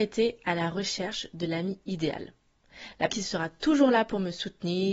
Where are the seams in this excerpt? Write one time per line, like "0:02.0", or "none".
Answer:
0:03.1